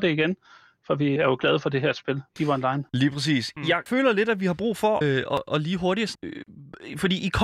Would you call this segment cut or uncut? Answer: cut